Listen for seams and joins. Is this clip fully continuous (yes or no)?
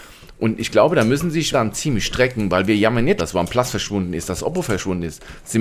no